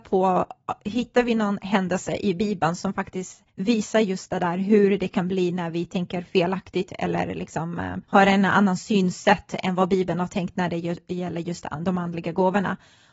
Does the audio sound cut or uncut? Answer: cut